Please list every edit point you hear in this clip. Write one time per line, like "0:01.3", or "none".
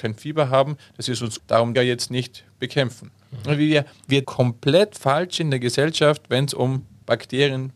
0:01.4
0:01.7
0:04.2